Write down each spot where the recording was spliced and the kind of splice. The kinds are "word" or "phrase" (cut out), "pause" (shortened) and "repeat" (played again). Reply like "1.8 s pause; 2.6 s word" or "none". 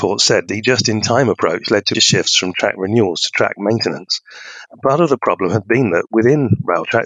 1.9 s word

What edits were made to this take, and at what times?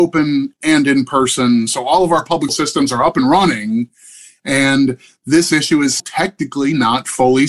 2.5 s word; 6.0 s word

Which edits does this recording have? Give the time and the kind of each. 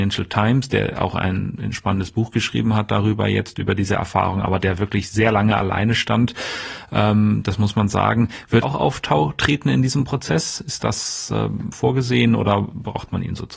8.6 s word

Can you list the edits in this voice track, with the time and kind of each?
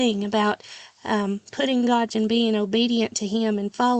2.1 s word

